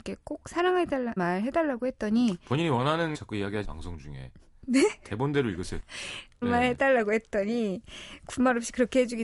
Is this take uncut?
no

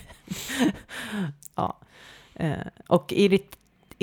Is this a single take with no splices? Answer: yes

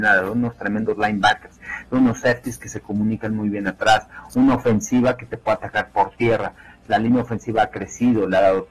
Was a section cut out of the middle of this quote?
no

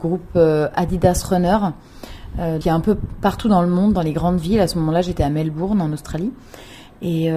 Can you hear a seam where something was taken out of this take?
yes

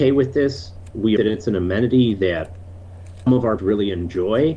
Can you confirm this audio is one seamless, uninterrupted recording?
no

